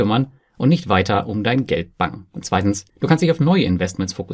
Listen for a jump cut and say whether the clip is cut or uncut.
cut